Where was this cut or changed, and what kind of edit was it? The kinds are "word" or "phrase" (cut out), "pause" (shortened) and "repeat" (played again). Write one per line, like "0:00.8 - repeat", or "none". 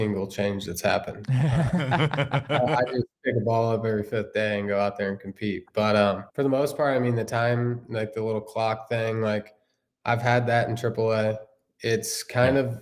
0:06.3 - pause